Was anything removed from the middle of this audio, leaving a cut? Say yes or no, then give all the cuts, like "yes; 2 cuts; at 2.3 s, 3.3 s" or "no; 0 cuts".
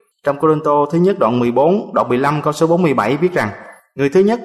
no; 0 cuts